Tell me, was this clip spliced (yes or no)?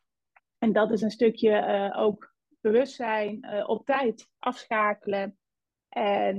no